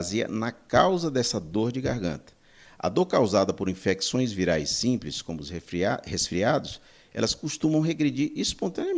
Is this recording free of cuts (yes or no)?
yes